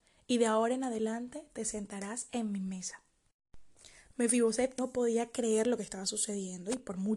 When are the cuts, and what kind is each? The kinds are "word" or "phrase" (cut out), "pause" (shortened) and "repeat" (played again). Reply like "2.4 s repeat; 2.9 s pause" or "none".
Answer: 4.8 s word